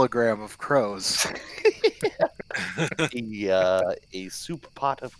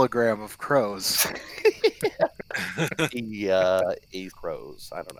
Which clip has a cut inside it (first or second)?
second